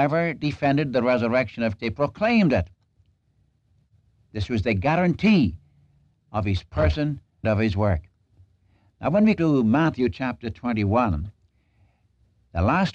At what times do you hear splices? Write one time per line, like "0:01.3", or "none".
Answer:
0:01.8
0:07.4
0:09.4